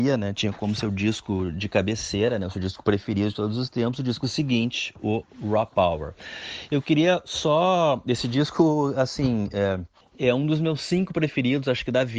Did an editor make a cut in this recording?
no; 0 cuts

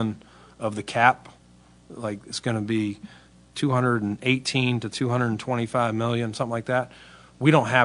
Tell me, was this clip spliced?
no; 0 cuts

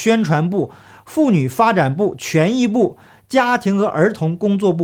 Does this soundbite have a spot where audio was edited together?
no; 0 cuts

